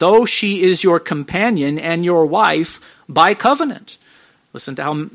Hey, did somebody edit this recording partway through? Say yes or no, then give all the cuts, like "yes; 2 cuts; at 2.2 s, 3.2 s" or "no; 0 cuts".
no; 0 cuts